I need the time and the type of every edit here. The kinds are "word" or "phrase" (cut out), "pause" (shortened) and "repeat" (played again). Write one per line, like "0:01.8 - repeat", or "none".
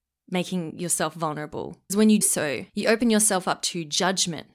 0:01.9 - word
0:02.2 - word
0:02.7 - pause